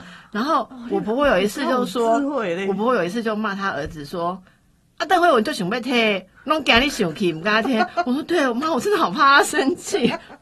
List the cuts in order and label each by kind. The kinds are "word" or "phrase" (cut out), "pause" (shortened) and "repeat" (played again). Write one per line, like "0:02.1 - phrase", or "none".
none